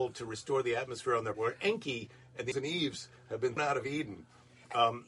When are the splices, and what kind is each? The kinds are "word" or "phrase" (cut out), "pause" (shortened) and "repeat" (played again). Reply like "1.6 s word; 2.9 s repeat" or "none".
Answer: 1.3 s word; 2.5 s word; 3.6 s word